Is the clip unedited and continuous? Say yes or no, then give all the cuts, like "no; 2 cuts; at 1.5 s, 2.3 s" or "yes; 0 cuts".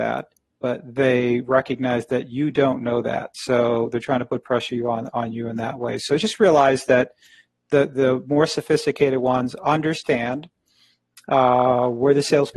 yes; 0 cuts